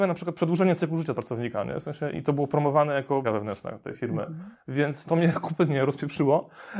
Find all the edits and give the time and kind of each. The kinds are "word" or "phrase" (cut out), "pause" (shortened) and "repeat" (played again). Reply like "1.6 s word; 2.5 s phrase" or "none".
1.1 s word; 2.1 s word; 3.2 s word; 5.1 s word

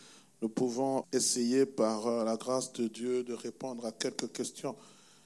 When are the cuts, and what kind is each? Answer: 1.0 s word

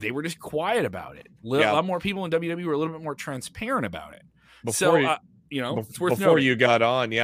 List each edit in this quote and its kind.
none

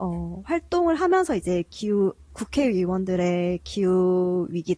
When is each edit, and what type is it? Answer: none

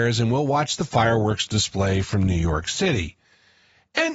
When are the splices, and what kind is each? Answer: none

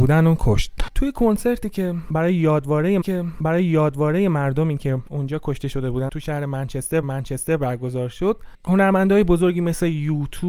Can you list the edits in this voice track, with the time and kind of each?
3.0 s repeat; 7.0 s repeat

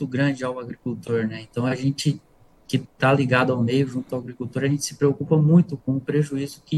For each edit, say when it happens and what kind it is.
none

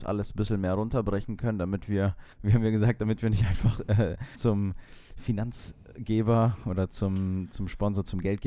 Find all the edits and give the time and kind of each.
2.3 s pause; 4.3 s word

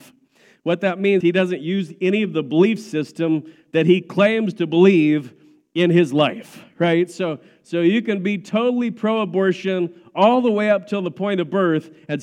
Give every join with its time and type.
1.2 s word

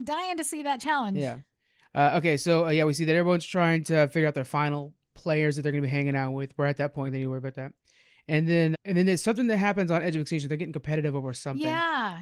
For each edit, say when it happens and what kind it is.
7.1 s word; 8.7 s word

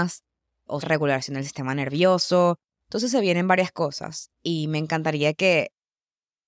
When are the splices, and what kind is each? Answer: 4.3 s pause

